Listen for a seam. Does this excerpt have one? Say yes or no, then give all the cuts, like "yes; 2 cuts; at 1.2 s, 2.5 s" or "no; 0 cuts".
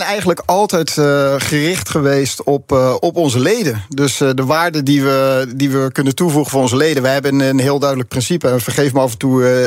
no; 0 cuts